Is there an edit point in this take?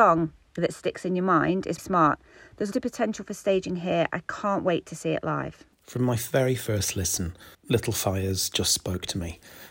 yes; 4 cuts; at 1.8 s, 2.7 s, 5.7 s, 7.5 s

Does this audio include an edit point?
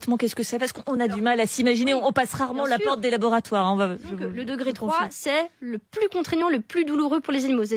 no; 0 cuts

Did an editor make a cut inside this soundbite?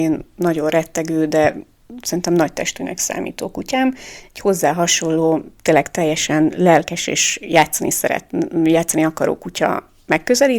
no; 0 cuts

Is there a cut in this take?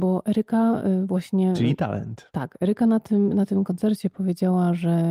no; 0 cuts

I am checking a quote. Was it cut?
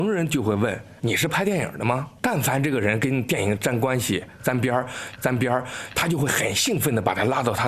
yes; 1 cut; at 5.2 s

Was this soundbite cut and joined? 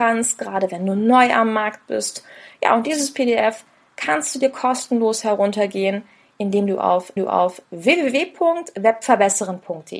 yes; 1 cut; at 7.2 s

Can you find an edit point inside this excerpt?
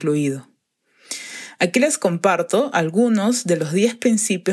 no; 0 cuts

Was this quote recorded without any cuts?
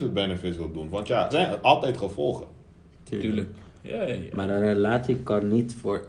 no; 1 cut; at 1.3 s

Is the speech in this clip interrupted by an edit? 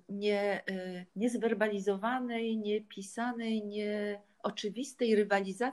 yes; 1 cut; at 1.1 s

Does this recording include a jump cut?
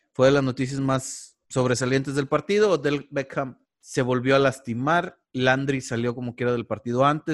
yes; 2 cuts; at 1.4 s, 3.6 s

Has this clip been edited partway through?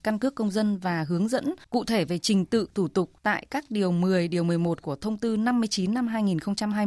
yes; 2 cuts; at 1.6 s, 3.2 s

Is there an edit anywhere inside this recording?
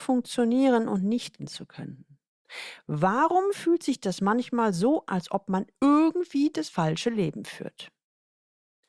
yes; 2 cuts; at 1.4 s, 5.1 s

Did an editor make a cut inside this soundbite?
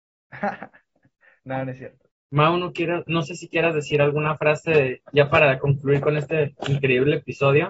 no; 0 cuts

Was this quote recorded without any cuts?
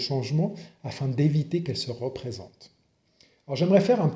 yes; 0 cuts

